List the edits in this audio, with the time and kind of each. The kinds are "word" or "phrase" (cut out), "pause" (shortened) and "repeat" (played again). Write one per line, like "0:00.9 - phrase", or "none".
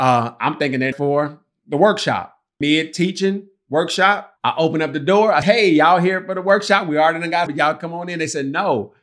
0:00.9 - word
0:02.6 - phrase
0:04.4 - pause
0:05.4 - word
0:07.5 - word